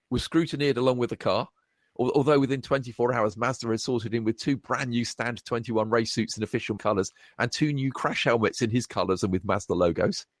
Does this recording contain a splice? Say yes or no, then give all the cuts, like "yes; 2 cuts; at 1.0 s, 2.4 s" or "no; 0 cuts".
yes; 1 cut; at 6.8 s